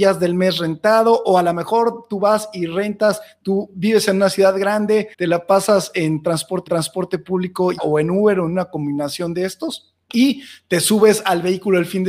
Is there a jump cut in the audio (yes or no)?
yes